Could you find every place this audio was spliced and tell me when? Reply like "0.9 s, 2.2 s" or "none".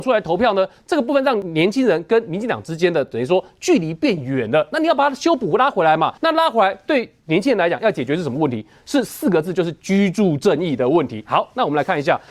6.2 s